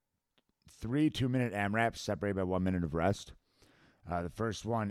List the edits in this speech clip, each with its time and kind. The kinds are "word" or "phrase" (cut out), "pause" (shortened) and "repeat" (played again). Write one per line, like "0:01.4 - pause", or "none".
none